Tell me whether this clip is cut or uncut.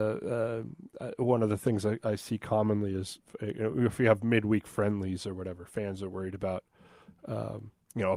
uncut